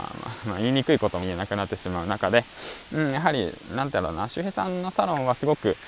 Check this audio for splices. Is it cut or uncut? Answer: cut